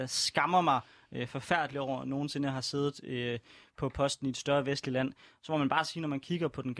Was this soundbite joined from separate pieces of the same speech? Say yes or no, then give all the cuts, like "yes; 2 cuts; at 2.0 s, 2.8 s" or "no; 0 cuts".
no; 0 cuts